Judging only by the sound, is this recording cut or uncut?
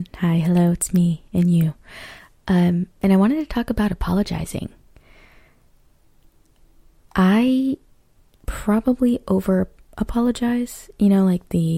uncut